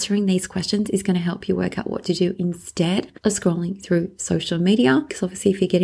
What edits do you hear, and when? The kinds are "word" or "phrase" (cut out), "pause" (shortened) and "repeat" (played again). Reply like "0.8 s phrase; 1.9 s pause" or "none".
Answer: none